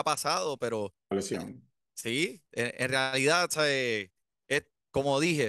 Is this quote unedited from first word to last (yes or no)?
no